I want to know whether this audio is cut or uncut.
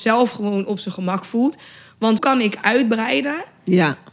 cut